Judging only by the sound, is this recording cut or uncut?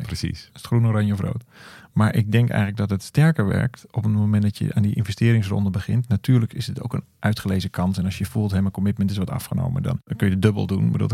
uncut